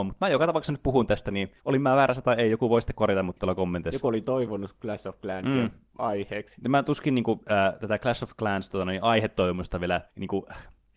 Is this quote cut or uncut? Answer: cut